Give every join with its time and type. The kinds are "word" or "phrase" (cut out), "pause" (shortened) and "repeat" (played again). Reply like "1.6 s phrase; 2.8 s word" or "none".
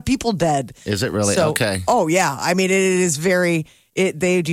none